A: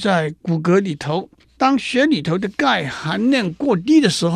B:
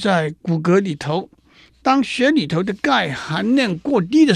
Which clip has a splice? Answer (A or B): A